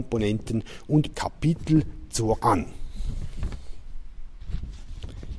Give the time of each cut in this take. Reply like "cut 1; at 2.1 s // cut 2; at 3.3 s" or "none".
cut 1; at 1.1 s // cut 2; at 2.4 s